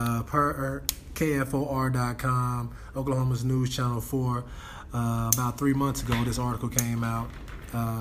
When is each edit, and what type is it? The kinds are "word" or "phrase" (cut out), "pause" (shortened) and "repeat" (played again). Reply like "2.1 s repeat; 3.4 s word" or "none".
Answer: none